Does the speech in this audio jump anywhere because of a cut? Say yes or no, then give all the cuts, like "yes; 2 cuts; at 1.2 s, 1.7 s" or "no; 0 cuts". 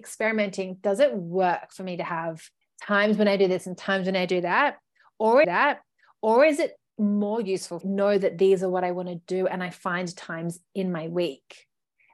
yes; 3 cuts; at 2.6 s, 5.4 s, 7.8 s